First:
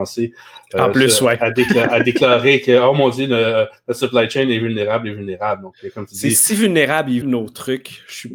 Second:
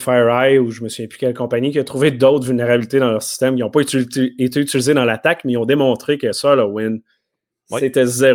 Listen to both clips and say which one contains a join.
first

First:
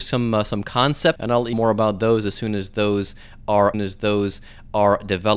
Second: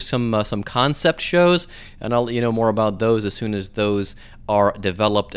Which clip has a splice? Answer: first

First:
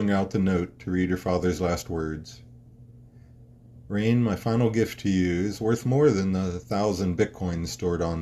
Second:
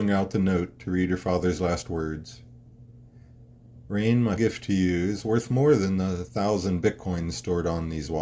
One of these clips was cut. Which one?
second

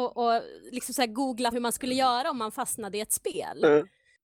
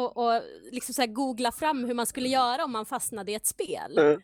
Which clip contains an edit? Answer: first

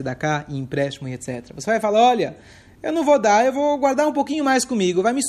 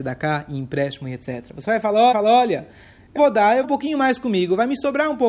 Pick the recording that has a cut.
second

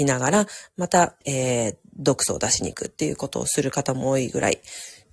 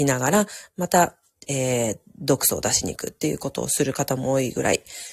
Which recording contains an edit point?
first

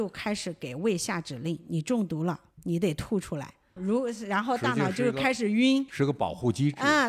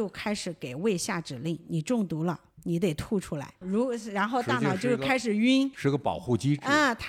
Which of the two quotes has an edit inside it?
second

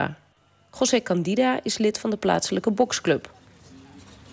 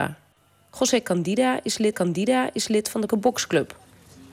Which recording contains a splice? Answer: second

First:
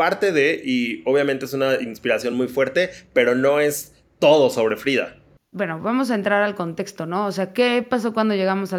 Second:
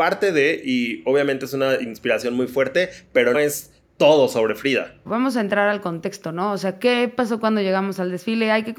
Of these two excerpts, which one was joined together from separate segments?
second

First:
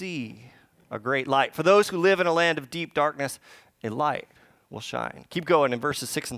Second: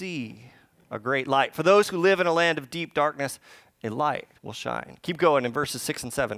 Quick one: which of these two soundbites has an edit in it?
second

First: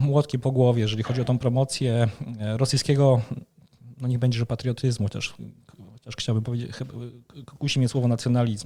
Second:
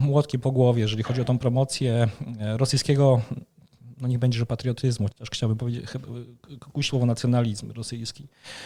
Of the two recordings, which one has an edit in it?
second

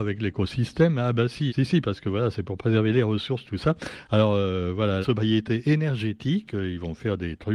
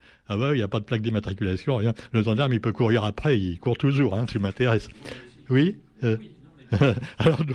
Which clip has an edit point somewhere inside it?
first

